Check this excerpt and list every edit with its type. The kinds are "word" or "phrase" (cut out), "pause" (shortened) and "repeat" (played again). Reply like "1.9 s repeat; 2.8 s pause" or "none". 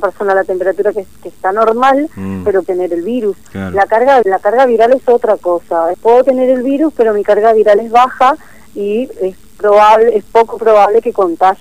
1.2 s pause; 2.6 s word; 4.2 s word; 5.9 s word; 9.1 s word